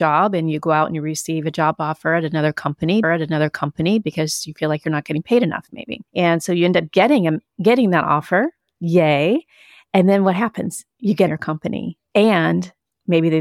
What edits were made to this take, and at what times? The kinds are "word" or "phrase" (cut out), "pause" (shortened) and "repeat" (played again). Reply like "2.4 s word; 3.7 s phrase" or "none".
3.0 s repeat; 6.1 s pause; 10.9 s pause; 11.3 s phrase